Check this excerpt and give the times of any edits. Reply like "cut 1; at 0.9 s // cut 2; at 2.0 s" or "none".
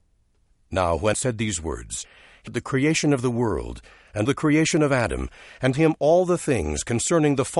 cut 1; at 1.1 s // cut 2; at 2.5 s // cut 3; at 4.3 s // cut 4; at 5.7 s